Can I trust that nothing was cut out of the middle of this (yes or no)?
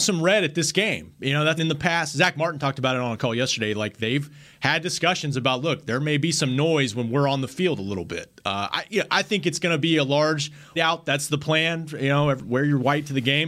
no